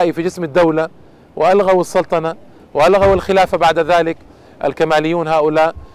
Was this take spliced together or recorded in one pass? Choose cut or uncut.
uncut